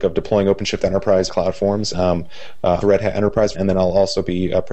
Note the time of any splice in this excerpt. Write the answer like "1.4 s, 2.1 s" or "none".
1.3 s, 1.9 s, 2.8 s, 3.5 s